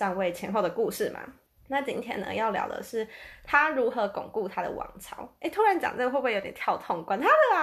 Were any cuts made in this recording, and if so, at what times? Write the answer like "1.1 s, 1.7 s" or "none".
1.5 s

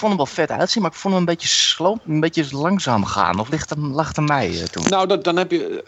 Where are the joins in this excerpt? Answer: none

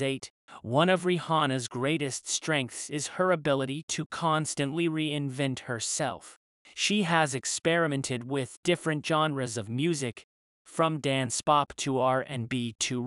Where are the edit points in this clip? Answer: none

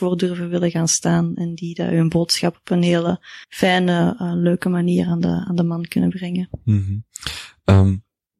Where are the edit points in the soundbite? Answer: 3.4 s

